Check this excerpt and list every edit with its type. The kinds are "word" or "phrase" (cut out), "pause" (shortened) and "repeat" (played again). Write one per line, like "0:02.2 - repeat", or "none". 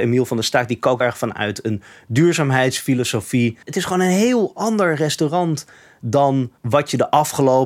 0:01.0 - word
0:03.6 - pause
0:06.6 - pause